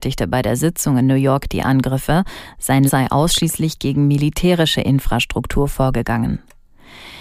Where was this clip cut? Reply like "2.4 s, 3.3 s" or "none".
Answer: 2.9 s